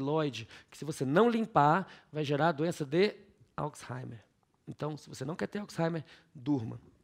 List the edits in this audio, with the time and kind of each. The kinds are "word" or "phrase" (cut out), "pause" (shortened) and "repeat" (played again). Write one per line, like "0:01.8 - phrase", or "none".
none